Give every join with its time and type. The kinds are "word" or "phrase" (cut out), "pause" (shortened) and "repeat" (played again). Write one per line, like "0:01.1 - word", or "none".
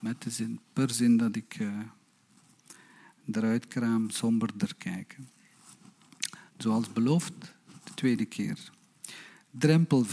0:06.5 - pause